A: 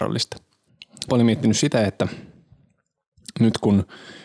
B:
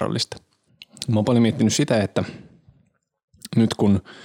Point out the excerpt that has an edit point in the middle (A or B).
A